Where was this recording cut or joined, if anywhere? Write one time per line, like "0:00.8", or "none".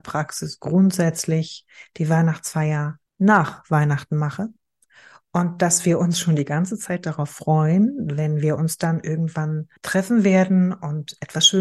0:03.1
0:09.8